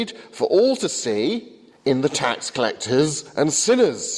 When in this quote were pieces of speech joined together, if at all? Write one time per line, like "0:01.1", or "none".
0:01.7